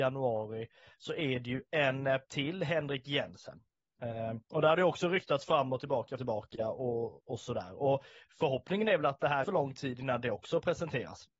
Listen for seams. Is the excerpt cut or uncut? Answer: cut